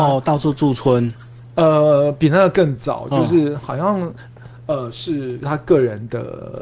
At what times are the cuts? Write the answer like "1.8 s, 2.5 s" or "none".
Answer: none